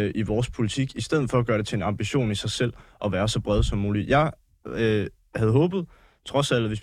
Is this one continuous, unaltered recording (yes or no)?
yes